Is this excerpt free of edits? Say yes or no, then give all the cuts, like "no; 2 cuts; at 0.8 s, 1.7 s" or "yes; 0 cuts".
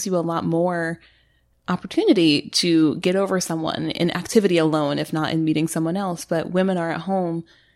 yes; 0 cuts